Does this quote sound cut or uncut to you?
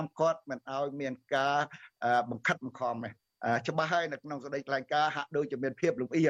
cut